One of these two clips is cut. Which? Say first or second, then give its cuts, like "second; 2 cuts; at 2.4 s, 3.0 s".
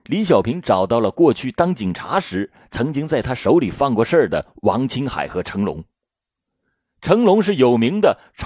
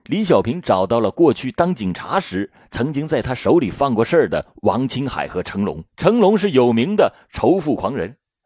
second; 1 cut; at 5.9 s